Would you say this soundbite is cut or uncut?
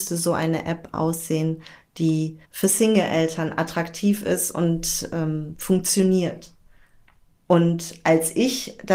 cut